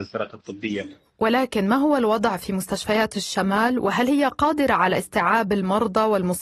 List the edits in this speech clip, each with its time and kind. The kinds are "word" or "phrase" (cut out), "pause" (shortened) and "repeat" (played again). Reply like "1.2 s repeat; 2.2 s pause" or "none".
none